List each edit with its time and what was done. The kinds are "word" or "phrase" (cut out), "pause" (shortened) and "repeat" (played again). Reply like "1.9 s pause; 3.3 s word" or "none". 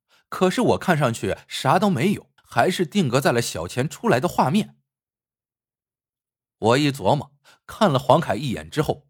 2.4 s pause